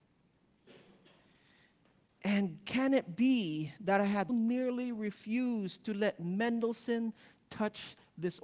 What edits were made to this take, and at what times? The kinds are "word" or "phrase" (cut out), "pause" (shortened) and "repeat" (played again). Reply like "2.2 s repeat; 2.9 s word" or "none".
4.3 s word